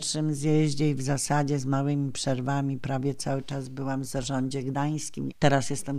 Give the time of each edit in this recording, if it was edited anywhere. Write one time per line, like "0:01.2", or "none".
none